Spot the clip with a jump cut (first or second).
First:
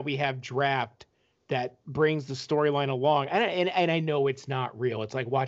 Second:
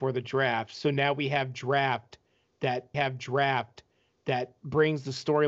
second